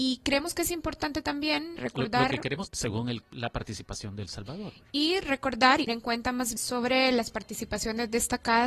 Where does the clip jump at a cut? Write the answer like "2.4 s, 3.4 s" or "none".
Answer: 1.8 s, 2.7 s, 3.2 s, 5.9 s, 6.6 s